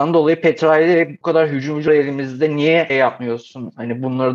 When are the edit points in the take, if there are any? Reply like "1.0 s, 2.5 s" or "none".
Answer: 1.2 s, 1.9 s, 2.9 s